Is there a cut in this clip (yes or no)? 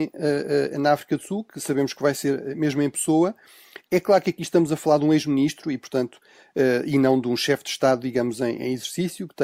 no